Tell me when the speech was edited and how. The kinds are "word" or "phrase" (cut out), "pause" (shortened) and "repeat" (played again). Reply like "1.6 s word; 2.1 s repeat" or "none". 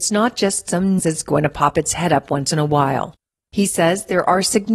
1.0 s word